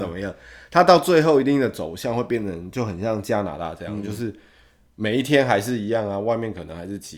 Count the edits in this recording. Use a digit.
0